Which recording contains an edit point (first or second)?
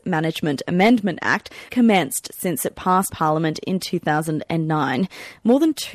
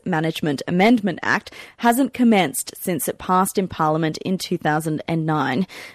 first